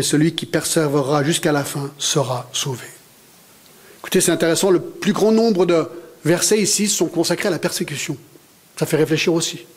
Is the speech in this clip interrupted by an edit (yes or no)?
no